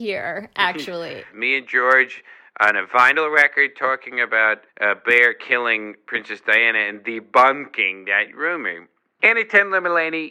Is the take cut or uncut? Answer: uncut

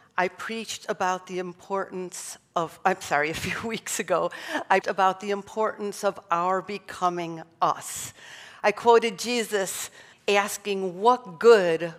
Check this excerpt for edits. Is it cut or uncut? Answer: cut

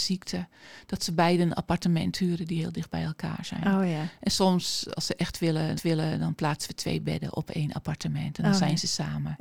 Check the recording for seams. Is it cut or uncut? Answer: cut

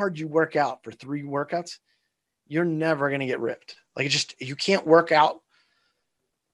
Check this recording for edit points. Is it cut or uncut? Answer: uncut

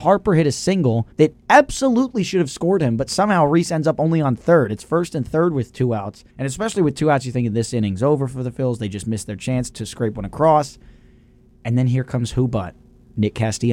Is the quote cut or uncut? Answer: cut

